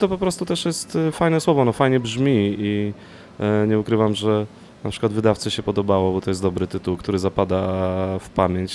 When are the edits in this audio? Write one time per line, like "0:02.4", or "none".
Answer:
none